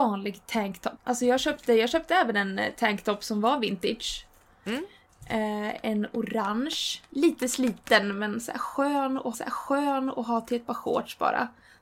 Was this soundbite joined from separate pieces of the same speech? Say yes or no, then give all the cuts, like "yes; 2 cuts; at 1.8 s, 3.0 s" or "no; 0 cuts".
yes; 2 cuts; at 1.0 s, 9.3 s